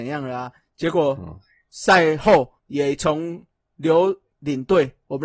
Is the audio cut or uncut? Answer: cut